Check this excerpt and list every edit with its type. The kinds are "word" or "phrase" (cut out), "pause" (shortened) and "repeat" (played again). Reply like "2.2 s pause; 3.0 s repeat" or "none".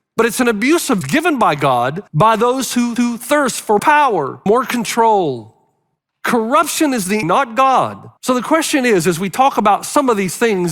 1.0 s phrase; 2.1 s pause; 3.0 s repeat; 3.8 s word; 4.5 s word; 6.0 s pause; 7.2 s word; 8.2 s pause